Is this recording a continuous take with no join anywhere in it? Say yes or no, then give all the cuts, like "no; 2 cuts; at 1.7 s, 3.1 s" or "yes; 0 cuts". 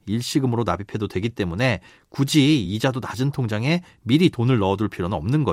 yes; 0 cuts